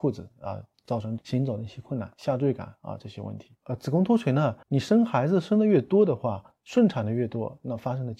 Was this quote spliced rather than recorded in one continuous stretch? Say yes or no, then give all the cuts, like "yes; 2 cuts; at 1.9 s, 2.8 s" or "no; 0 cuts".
yes; 1 cut; at 4.6 s